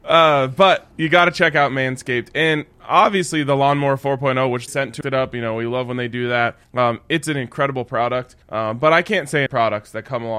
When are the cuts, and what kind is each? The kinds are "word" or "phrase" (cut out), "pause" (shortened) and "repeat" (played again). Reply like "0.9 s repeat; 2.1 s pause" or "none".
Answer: 0.9 s pause; 4.7 s word; 5.0 s phrase; 6.6 s pause; 8.4 s pause; 9.5 s phrase